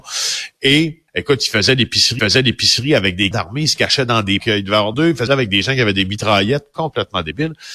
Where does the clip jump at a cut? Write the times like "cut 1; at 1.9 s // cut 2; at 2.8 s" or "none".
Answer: cut 1; at 1.1 s // cut 2; at 2.2 s // cut 3; at 3.3 s // cut 4; at 4.4 s // cut 5; at 4.9 s // cut 6; at 5.3 s